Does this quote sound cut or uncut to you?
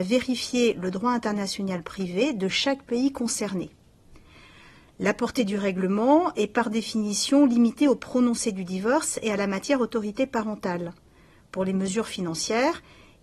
uncut